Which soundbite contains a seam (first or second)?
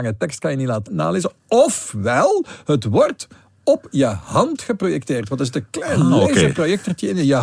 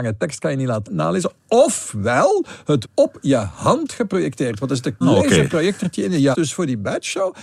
second